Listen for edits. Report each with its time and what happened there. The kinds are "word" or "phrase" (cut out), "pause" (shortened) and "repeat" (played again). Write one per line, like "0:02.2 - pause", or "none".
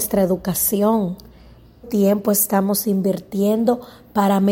0:01.8 - word